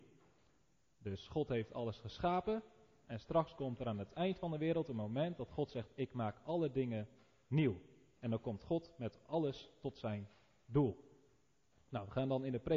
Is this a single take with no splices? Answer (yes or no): yes